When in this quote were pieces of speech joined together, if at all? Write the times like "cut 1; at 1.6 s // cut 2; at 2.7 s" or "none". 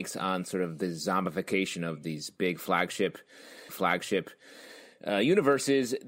cut 1; at 3.7 s